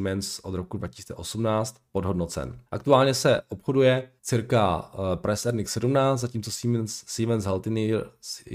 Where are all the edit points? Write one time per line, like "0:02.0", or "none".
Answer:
0:02.7
0:04.2